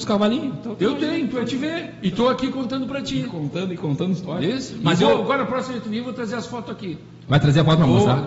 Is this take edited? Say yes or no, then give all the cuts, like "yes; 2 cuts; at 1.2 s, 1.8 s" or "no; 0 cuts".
no; 0 cuts